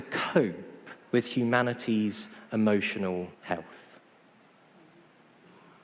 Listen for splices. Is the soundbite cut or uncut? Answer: cut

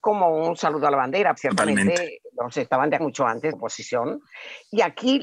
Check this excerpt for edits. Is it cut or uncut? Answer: cut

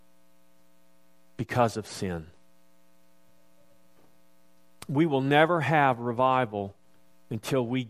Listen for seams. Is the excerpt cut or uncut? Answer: uncut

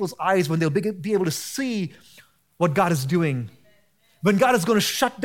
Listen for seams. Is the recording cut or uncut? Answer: uncut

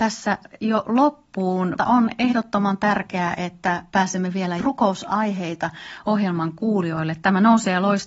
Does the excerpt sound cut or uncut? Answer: cut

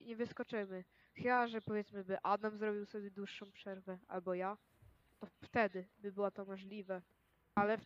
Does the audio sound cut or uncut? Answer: uncut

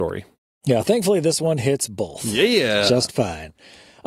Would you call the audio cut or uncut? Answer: uncut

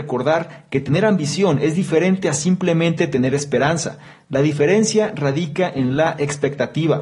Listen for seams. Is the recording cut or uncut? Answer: uncut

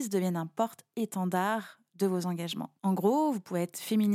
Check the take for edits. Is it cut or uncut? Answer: cut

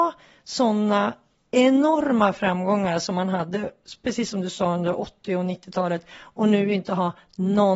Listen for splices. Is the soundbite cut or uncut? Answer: uncut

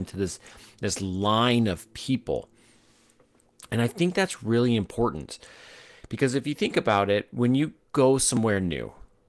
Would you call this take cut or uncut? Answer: uncut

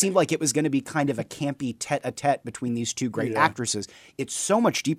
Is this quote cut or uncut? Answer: uncut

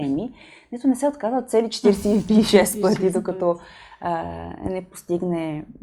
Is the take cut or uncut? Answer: uncut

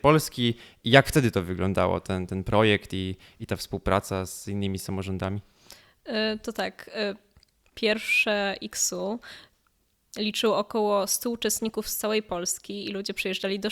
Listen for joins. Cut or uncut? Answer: uncut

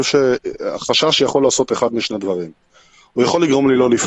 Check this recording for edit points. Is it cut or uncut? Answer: uncut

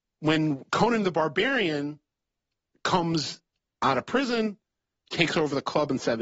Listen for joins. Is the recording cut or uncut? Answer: uncut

